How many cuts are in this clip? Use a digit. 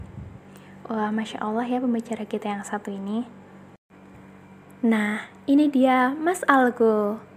0